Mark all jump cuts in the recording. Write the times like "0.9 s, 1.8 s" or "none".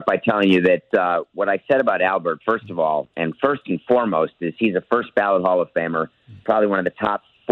none